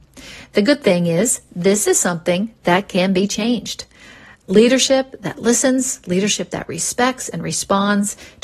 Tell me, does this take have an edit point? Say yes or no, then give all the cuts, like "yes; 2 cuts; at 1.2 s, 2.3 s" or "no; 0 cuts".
no; 0 cuts